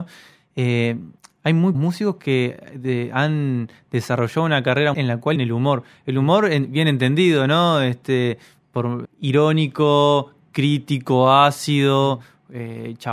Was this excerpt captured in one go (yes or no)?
no